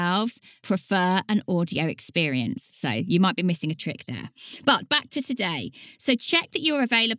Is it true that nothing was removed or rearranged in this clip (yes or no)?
yes